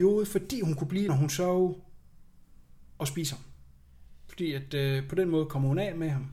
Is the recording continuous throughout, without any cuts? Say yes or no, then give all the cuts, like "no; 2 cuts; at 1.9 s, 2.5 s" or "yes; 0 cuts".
no; 1 cut; at 1.1 s